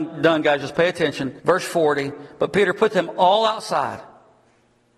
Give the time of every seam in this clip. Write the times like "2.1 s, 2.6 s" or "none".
1.4 s